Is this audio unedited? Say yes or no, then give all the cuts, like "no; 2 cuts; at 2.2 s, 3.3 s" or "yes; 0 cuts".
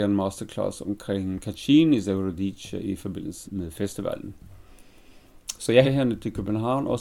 no; 2 cuts; at 3.4 s, 5.8 s